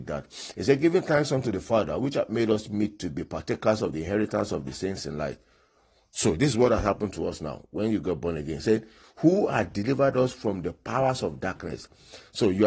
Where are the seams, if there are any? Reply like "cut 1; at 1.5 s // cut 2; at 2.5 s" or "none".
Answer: none